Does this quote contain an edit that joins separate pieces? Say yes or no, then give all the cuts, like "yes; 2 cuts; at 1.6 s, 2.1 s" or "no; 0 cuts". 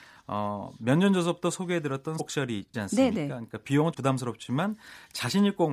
yes; 3 cuts; at 2.2 s, 2.7 s, 3.9 s